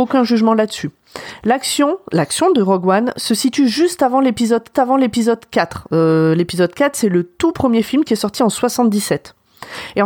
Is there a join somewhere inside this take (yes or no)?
yes